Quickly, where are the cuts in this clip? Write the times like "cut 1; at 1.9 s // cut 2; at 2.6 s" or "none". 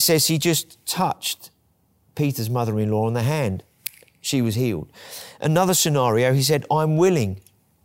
none